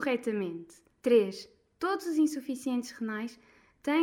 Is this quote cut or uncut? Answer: uncut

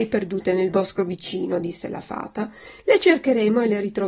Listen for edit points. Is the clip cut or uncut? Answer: uncut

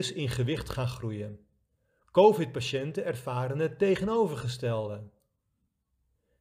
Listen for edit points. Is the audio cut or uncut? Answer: cut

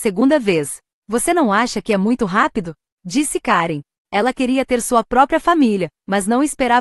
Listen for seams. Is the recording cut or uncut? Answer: uncut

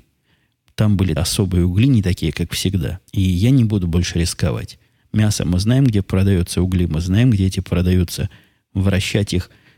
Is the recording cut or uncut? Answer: cut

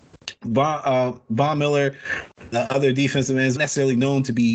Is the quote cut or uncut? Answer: cut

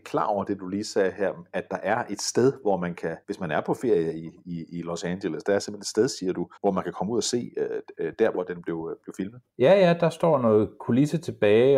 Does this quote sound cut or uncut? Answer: cut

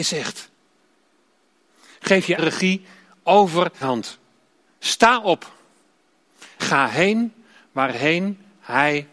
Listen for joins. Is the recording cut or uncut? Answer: cut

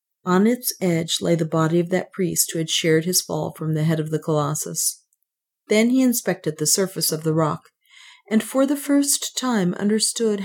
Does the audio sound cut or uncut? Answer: uncut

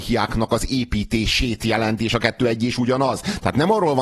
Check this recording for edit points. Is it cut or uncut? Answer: uncut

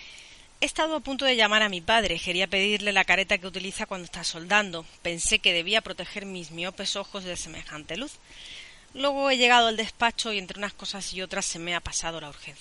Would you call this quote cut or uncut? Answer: uncut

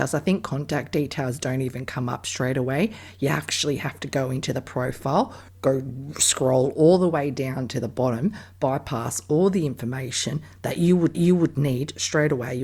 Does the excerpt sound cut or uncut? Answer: cut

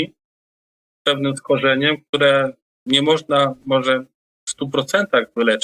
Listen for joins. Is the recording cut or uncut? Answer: uncut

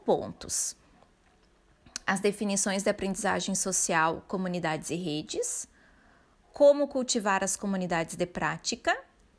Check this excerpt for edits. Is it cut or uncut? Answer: uncut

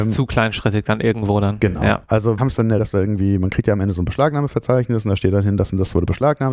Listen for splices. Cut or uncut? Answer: cut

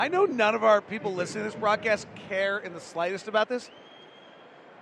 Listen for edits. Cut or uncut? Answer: uncut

